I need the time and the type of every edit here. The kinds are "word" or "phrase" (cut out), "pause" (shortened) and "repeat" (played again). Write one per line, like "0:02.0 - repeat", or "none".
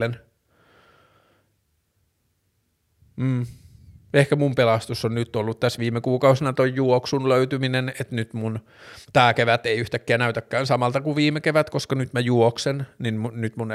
0:09.0 - pause